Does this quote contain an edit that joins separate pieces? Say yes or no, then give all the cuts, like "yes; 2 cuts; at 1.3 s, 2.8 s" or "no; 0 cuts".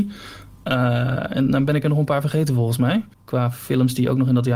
yes; 1 cut; at 3.1 s